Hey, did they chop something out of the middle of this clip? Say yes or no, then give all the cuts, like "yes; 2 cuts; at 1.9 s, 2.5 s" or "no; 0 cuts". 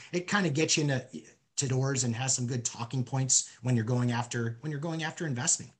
yes; 1 cut; at 1.7 s